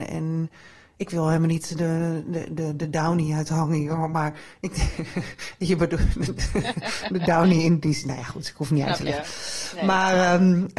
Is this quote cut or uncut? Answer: uncut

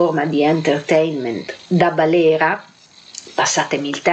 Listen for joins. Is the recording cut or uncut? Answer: uncut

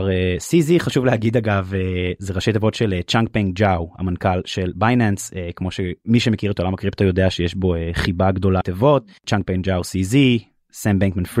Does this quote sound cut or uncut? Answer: cut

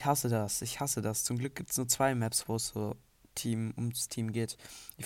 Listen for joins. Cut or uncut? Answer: uncut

